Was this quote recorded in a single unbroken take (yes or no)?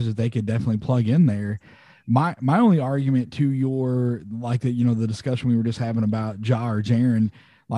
yes